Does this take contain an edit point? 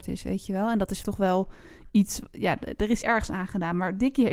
yes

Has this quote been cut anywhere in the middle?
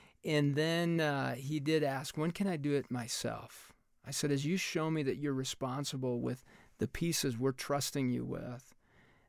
no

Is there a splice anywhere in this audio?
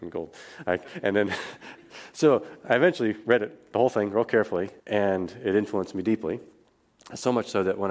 yes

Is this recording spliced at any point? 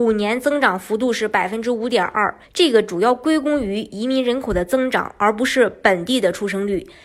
yes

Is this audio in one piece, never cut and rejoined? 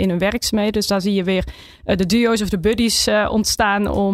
yes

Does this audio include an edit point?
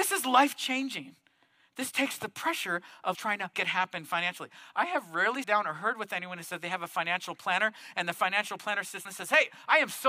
yes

